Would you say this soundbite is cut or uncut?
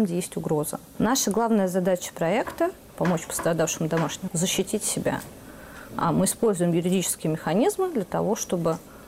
cut